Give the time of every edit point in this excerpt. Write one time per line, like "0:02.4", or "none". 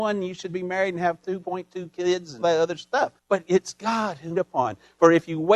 0:02.4
0:03.2
0:04.3

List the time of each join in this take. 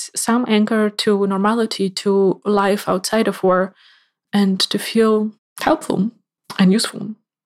none

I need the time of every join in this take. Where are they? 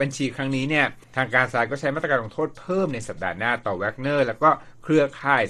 0:01.0

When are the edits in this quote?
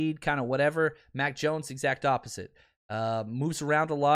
none

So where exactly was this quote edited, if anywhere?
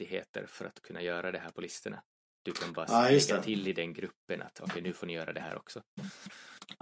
none

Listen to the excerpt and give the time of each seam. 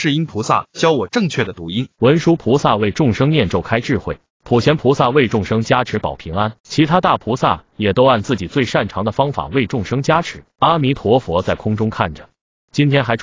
0:01.9
0:06.6
0:10.5

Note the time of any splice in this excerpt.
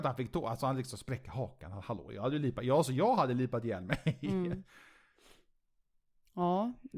none

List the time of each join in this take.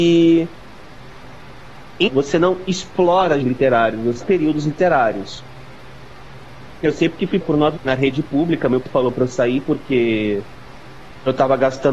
0:02.1
0:03.4
0:04.2
0:07.4
0:07.8
0:08.8

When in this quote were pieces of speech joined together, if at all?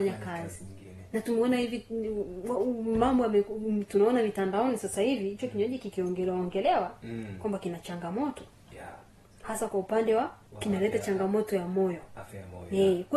none

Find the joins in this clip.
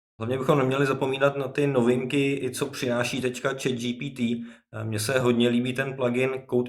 none

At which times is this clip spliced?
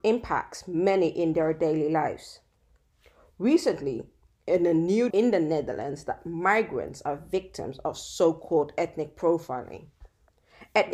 0:05.1

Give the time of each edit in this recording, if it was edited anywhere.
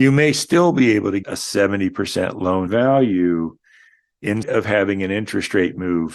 0:01.2
0:02.7
0:04.4

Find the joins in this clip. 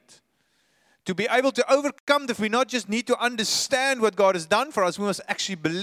0:02.4

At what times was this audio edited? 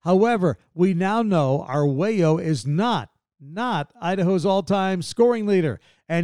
none

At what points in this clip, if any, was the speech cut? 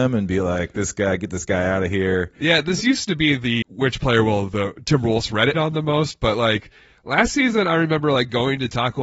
0:03.6
0:05.5

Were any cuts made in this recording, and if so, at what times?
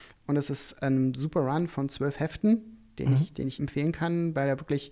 0:03.6

